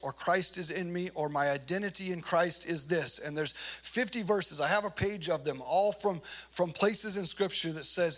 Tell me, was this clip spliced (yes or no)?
no